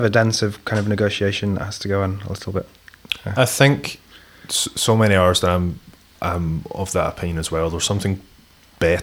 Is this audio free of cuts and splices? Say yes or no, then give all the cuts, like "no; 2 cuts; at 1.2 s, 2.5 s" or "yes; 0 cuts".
yes; 0 cuts